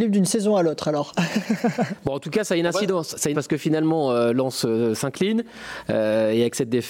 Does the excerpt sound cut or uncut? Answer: cut